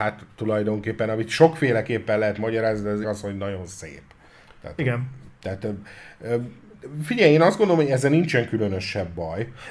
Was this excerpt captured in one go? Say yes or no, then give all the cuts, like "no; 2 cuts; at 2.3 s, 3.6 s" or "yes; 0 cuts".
no; 1 cut; at 3.0 s